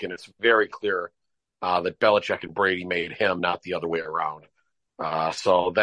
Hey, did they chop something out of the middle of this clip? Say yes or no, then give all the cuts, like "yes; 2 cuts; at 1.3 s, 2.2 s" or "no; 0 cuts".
no; 0 cuts